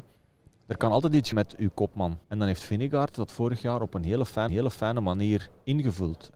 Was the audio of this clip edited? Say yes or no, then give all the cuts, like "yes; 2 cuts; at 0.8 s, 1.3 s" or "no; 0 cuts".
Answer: yes; 3 cuts; at 1.3 s, 2.2 s, 4.5 s